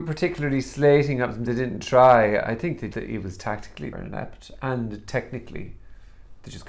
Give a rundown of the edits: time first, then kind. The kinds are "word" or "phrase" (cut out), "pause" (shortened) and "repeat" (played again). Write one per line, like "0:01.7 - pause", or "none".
0:01.5 - word
0:02.9 - word
0:03.9 - phrase